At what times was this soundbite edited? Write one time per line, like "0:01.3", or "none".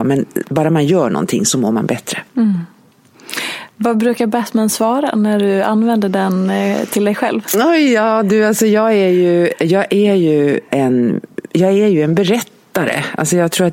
0:02.3
0:10.7